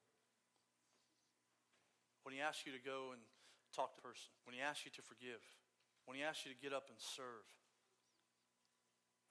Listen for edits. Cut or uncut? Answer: cut